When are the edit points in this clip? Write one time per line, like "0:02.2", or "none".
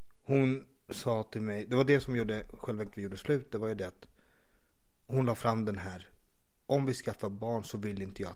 0:02.9